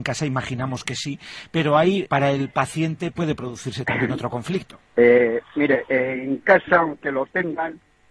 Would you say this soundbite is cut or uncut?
cut